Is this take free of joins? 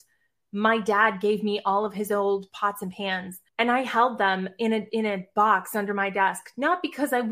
no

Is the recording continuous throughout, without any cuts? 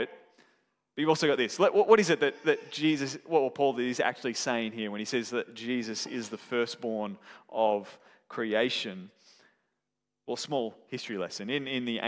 yes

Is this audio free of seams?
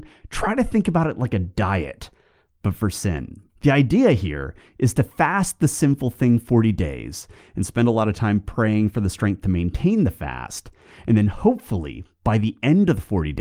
no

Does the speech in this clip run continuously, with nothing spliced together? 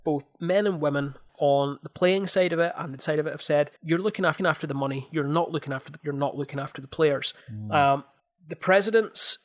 no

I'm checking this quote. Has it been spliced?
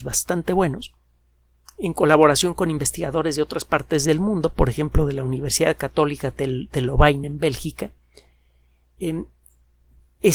no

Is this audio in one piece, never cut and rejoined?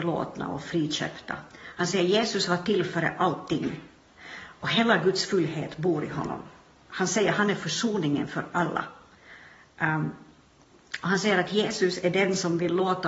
no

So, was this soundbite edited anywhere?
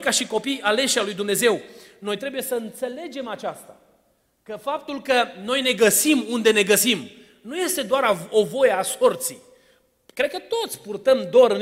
no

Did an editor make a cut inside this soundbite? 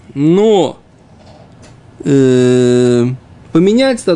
no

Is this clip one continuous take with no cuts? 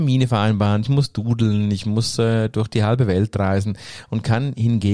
yes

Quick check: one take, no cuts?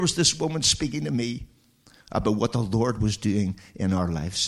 yes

